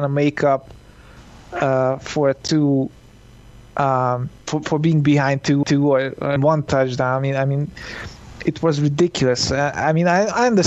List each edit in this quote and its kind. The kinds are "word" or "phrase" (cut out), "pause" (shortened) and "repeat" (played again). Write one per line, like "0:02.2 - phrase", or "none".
0:05.6 - repeat
0:06.4 - word